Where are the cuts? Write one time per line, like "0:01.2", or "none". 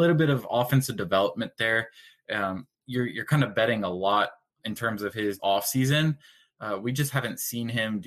0:02.7
0:04.5
0:05.4